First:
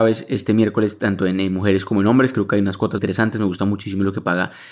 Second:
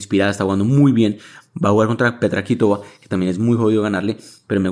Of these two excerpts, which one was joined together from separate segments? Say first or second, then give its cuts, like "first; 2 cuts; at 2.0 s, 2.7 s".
first; 1 cut; at 3.0 s